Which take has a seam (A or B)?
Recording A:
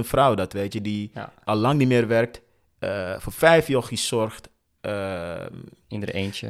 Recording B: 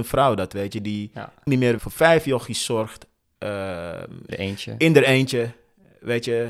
B